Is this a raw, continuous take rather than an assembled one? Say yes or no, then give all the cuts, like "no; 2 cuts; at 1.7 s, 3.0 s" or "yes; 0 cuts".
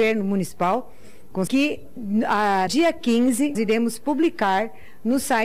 no; 3 cuts; at 1.5 s, 2.7 s, 3.5 s